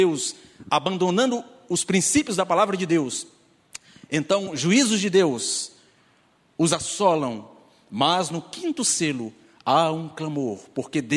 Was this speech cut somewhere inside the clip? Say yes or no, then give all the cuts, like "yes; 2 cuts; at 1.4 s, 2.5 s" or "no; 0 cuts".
no; 0 cuts